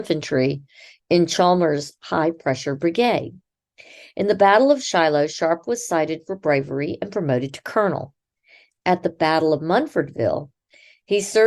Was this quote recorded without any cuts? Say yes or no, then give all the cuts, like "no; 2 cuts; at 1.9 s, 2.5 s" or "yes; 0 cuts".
yes; 0 cuts